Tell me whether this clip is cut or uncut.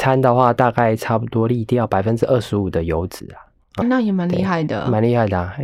cut